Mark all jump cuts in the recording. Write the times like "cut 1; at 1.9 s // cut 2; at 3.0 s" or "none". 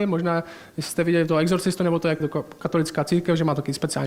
cut 1; at 2.2 s